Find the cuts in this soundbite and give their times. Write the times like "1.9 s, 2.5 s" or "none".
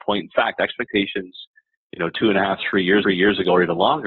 3.0 s

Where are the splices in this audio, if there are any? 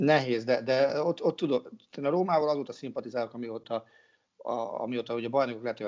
none

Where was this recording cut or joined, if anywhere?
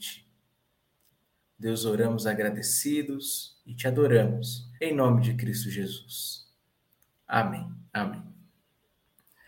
3.6 s, 4.8 s, 7.9 s

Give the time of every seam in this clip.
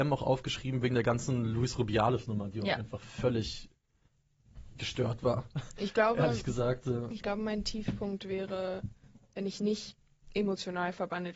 none

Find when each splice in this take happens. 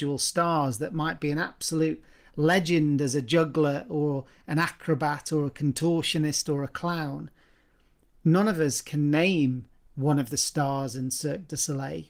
none

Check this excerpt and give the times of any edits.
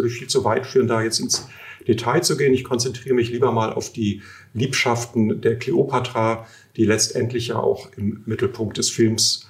none

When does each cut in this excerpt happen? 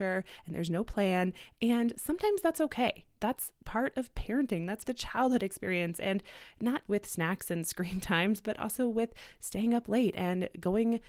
4.9 s, 6.9 s

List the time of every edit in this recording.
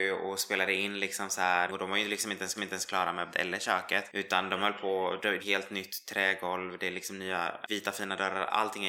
1.7 s, 2.6 s, 3.3 s, 5.4 s

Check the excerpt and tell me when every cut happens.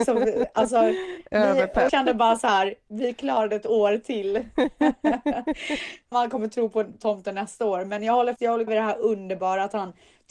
1.9 s, 6.1 s, 8.4 s, 8.7 s

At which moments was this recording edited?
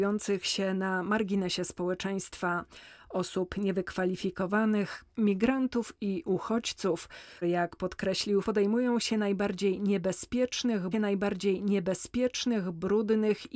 5.1 s, 7.4 s, 8.4 s, 10.9 s

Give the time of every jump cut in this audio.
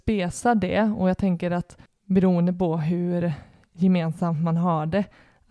none

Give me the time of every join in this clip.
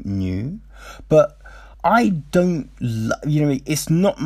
1.7 s

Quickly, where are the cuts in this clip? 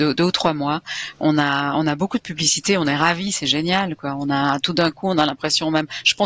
none

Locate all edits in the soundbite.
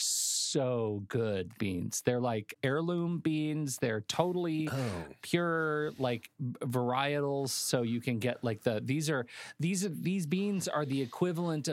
1.5 s

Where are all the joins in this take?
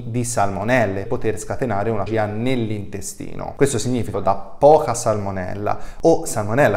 1.1 s, 2.1 s, 4.1 s

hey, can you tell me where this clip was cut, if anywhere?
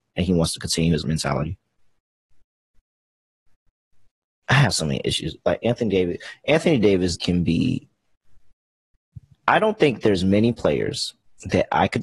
1.0 s, 7.2 s, 9.3 s

